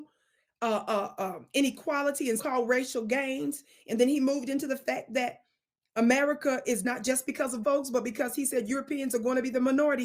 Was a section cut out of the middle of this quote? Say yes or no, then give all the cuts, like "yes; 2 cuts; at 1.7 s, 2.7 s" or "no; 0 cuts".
yes; 3 cuts; at 2.4 s, 6.8 s, 7.6 s